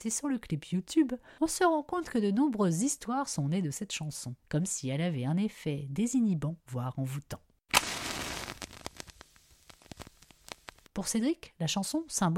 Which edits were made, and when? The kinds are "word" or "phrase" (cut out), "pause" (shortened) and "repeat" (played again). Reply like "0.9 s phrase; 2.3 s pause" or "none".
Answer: 4.4 s pause; 6.6 s pause